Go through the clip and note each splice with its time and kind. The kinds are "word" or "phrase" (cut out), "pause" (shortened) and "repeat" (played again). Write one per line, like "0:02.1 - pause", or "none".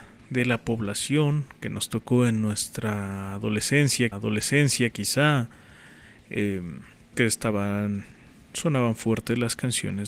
0:04.1 - repeat
0:07.1 - word